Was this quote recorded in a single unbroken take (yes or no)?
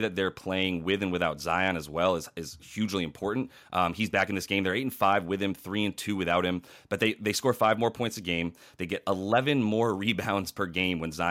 yes